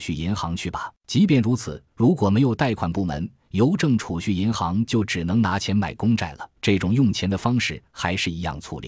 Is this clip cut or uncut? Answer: cut